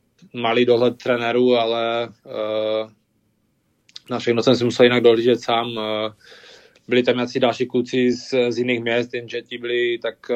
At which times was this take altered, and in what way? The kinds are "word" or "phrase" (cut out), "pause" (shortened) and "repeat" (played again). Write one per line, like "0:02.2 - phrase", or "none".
none